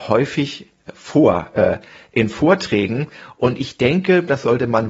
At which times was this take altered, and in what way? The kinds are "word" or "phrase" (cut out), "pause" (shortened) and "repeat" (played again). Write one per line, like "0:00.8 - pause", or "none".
none